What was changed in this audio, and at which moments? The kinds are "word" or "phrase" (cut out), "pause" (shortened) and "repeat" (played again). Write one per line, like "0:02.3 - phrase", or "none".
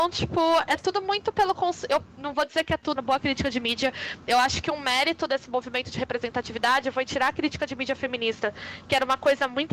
0:03.0 - phrase